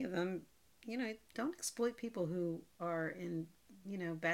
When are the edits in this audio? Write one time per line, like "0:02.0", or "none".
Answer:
0:02.7